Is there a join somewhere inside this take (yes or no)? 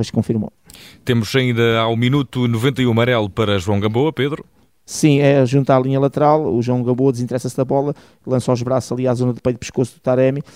no